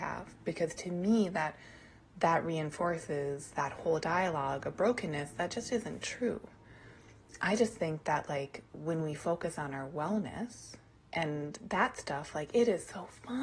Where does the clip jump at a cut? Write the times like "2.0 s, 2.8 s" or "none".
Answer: none

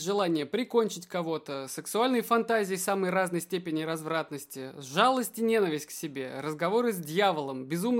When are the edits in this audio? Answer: none

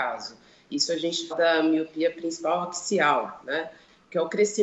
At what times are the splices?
1.3 s

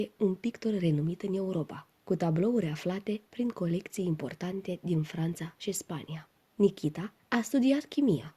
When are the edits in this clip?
3.3 s

